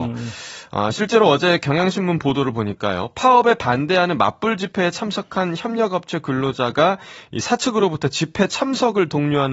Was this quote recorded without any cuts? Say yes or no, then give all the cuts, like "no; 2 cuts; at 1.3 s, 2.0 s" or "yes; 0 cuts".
yes; 0 cuts